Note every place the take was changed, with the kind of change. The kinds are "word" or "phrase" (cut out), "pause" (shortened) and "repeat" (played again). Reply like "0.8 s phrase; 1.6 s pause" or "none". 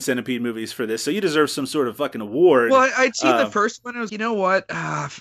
4.1 s word